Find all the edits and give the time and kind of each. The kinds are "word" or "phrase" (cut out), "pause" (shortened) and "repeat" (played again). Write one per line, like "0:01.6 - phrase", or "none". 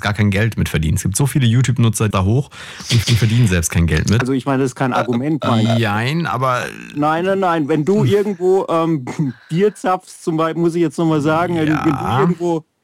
0:02.1 - phrase
0:03.0 - repeat

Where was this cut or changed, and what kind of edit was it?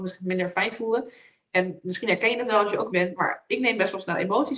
0:02.9 - word

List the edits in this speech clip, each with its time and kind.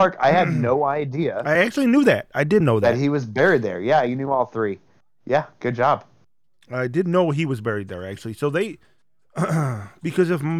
none

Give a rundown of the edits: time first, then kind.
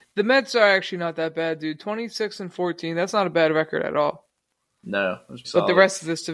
0:05.4 - word

